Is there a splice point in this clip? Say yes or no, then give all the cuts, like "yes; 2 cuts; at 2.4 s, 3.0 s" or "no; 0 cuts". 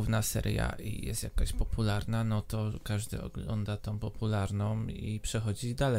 yes; 1 cut; at 3.8 s